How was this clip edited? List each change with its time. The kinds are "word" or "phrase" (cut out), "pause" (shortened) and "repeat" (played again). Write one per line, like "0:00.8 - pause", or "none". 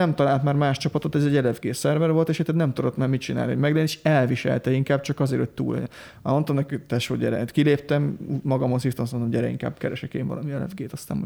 none